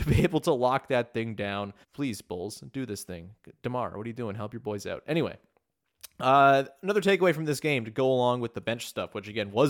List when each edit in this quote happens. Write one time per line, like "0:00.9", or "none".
0:01.8